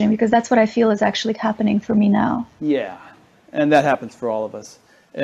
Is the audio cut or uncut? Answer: uncut